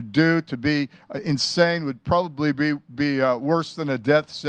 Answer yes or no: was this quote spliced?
no